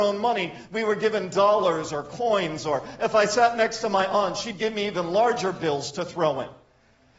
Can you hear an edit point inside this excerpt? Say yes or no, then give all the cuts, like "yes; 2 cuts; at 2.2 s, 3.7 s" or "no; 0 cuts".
no; 0 cuts